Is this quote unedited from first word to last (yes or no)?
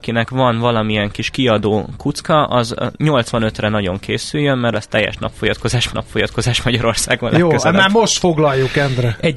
no